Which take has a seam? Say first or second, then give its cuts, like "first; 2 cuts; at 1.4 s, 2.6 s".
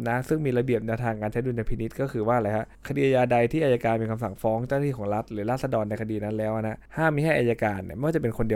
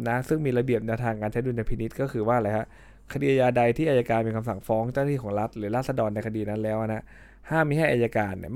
first; 2 cuts; at 2.7 s, 6.9 s